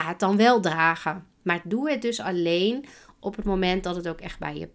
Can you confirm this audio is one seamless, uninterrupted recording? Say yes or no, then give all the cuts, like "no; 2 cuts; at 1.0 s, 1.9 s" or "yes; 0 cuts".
yes; 0 cuts